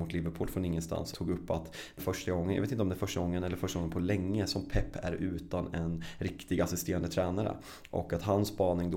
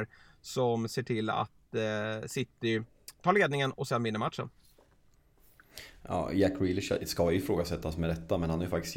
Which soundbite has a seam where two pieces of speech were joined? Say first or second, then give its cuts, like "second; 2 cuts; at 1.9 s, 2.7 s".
first; 2 cuts; at 1.1 s, 2.0 s